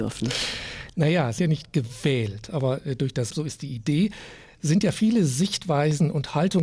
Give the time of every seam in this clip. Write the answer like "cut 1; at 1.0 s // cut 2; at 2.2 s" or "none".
cut 1; at 1.4 s // cut 2; at 3.3 s